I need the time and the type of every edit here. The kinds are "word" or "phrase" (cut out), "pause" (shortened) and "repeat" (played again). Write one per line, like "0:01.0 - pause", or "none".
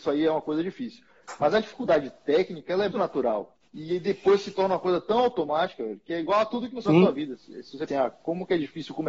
0:02.9 - word
0:03.6 - pause
0:06.9 - word
0:07.9 - phrase